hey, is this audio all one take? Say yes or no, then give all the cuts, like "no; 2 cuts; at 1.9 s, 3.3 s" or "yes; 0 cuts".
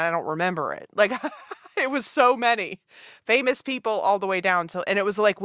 yes; 0 cuts